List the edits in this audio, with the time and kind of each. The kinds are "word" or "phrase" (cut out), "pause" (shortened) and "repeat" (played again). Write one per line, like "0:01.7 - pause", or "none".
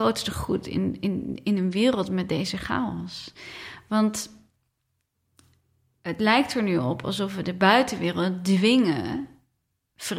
none